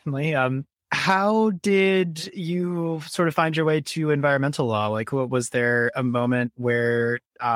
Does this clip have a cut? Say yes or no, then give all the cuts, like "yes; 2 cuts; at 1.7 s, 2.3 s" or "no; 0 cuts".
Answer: no; 0 cuts